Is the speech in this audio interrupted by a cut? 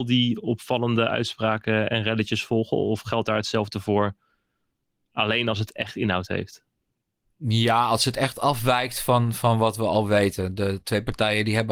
no; 0 cuts

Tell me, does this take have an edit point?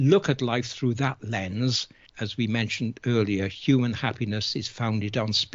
yes; 1 cut; at 2.1 s

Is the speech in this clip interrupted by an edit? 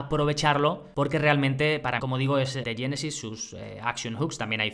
yes; 2 cuts; at 2.0 s, 2.6 s

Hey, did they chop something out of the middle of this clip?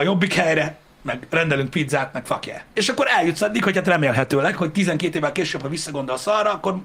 yes; 1 cut; at 2.7 s

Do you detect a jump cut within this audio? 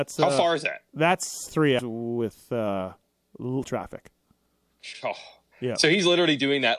yes; 2 cuts; at 1.8 s, 3.6 s

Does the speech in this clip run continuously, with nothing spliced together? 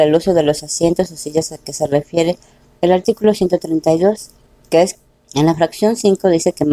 yes; 0 cuts

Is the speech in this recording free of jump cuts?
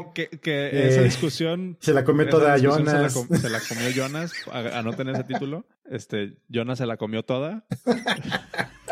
no; 1 cut; at 5.7 s

